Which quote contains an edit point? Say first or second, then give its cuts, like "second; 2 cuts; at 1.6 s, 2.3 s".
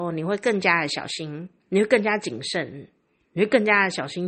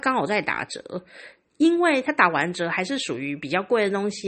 first; 1 cut; at 1.6 s